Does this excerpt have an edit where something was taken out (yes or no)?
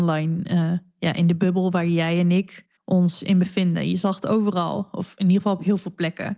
yes